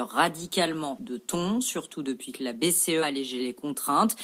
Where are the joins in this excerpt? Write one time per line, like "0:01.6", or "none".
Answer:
0:01.0
0:03.0